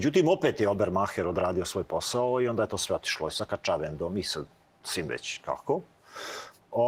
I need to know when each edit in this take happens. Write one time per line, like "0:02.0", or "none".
none